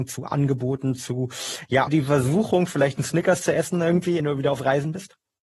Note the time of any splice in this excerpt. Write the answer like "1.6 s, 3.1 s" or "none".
1.9 s, 4.2 s